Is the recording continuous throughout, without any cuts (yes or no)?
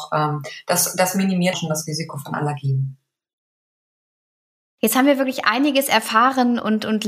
no